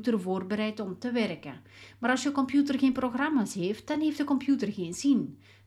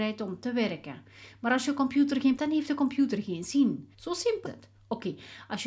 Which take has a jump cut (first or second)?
second